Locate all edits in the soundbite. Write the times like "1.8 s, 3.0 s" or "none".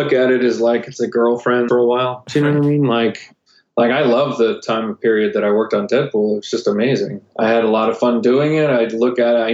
1.7 s